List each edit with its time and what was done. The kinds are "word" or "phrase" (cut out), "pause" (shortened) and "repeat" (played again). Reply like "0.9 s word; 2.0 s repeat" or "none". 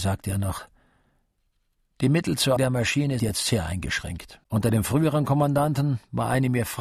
2.6 s word; 3.2 s word; 4.4 s pause